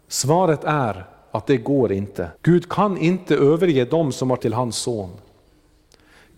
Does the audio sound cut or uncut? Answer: cut